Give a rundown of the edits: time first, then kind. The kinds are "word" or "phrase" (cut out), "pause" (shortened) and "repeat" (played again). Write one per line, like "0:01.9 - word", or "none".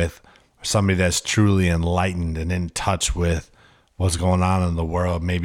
none